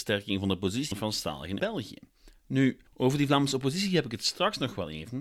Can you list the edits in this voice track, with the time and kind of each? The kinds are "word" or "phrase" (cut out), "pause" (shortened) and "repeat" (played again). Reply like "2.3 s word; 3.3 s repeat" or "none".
0.9 s word; 1.6 s word; 2.9 s pause